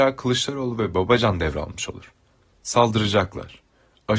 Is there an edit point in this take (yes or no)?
no